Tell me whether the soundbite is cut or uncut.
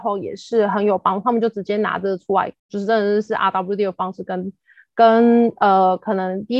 cut